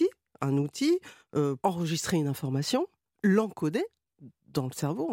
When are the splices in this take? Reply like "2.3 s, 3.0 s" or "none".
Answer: 1.6 s, 3.0 s